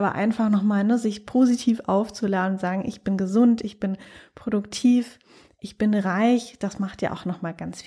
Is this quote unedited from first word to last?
yes; 0 cuts

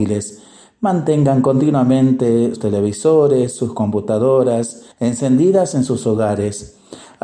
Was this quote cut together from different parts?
yes; 2 cuts; at 2.6 s, 4.9 s

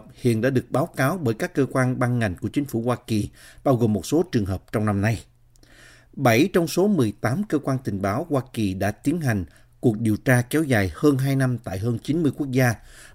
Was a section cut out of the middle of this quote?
no; 0 cuts

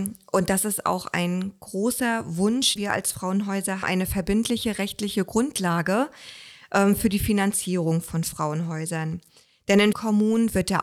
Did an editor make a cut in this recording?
yes; 3 cuts; at 2.8 s, 3.8 s, 9.9 s

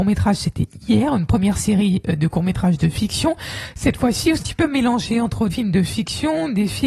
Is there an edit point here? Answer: yes; 2 cuts; at 4.4 s, 5.5 s

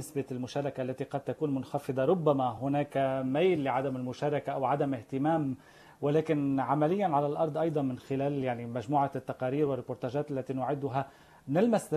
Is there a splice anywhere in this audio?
no; 0 cuts

